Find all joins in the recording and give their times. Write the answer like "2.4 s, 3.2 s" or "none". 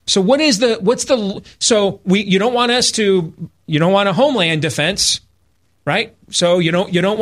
6.2 s